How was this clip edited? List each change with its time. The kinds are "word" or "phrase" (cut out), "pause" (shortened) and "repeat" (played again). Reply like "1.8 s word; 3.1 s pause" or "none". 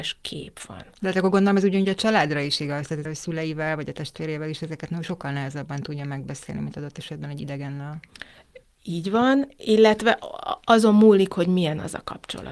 3.1 s word